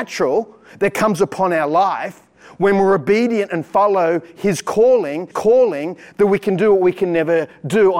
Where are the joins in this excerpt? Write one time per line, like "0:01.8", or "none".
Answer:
0:05.3